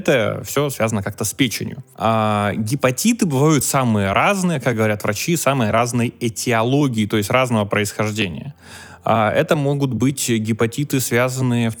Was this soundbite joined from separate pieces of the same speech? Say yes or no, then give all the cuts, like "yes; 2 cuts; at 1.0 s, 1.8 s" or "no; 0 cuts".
no; 0 cuts